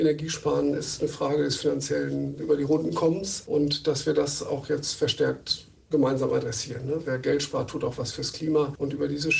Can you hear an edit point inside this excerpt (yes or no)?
no